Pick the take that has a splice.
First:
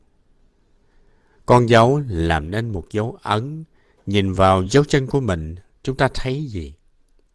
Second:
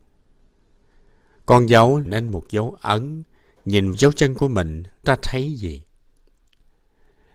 second; 3 cuts; at 2.0 s, 3.9 s, 5.0 s

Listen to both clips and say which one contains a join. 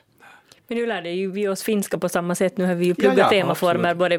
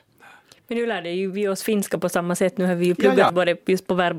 second; 1 cut; at 3.3 s

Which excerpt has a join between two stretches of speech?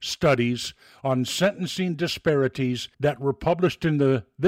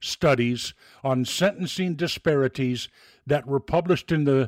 first; 1 cut; at 2.9 s

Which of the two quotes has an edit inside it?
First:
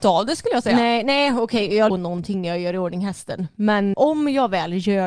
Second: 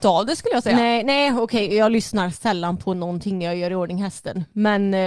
first; 2 cuts; at 1.9 s, 3.9 s

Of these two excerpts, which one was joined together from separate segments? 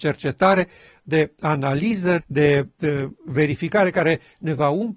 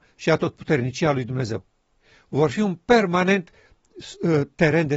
first; 1 cut; at 2.2 s

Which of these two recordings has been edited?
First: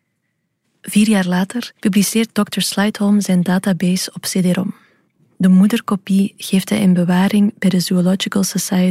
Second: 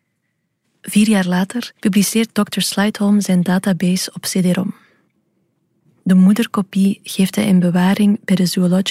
first; 1 cut; at 5.2 s

